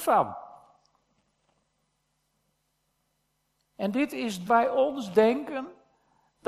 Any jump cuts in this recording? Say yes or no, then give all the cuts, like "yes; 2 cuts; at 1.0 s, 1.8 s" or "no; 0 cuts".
yes; 1 cut; at 4.5 s